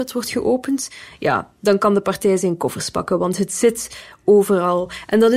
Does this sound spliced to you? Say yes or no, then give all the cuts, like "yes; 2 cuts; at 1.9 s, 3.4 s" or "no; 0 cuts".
no; 0 cuts